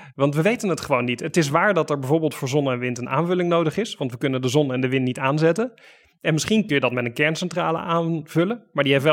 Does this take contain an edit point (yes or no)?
no